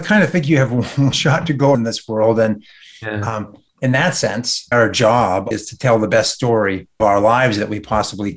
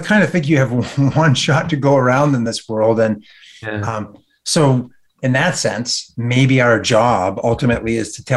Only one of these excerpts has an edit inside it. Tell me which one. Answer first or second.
first